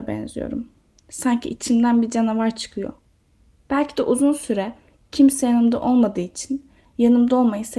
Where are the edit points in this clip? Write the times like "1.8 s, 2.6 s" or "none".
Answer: none